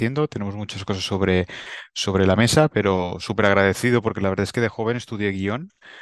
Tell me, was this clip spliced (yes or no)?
no